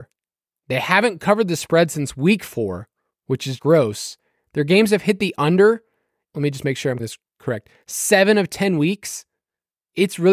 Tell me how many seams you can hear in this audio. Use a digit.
3